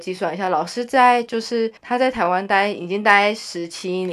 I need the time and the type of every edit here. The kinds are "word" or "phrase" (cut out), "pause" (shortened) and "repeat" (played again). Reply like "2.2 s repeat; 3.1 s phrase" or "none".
1.8 s pause